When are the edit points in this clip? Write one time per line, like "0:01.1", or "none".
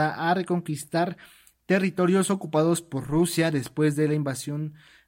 none